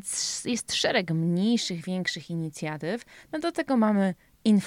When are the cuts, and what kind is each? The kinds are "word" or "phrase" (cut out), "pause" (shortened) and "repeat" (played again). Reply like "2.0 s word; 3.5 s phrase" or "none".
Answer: none

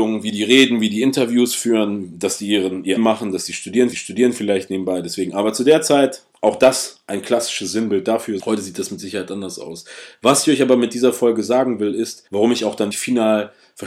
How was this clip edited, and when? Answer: 3.0 s word; 3.9 s repeat; 8.4 s word; 12.3 s pause; 12.9 s word

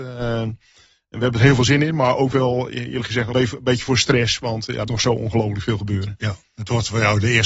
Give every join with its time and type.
3.3 s word; 4.9 s word

